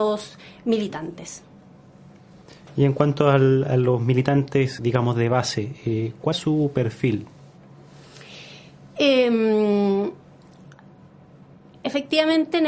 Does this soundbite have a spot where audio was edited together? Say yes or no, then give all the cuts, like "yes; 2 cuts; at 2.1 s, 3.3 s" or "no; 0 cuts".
yes; 2 cuts; at 4.8 s, 6.3 s